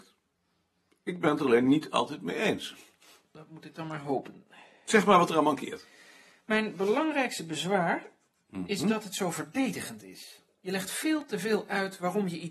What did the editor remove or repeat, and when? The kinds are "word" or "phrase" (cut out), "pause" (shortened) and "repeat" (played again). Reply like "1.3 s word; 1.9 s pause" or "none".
none